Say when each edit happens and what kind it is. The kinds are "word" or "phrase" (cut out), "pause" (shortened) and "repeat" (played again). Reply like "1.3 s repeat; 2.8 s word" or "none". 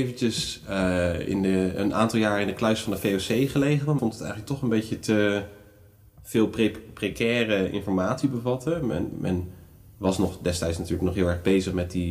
4.0 s word